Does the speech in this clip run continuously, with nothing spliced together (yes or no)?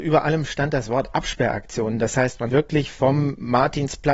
no